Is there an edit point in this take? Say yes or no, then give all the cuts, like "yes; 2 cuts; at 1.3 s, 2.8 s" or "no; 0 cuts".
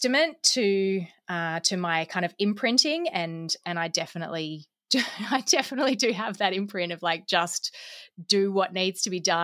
no; 0 cuts